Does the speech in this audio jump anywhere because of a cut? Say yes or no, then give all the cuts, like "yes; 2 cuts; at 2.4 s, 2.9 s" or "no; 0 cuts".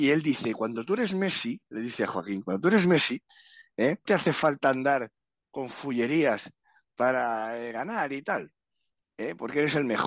yes; 1 cut; at 4.1 s